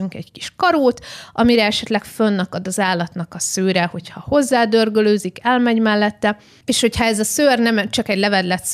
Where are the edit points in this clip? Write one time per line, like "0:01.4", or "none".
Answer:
none